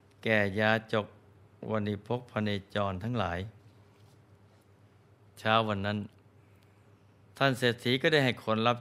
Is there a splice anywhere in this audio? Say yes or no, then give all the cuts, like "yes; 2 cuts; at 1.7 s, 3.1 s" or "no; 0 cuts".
no; 0 cuts